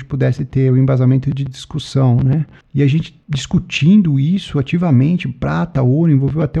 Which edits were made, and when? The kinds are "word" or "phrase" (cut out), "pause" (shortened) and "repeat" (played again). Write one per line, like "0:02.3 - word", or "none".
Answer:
0:02.6 - pause
0:03.2 - pause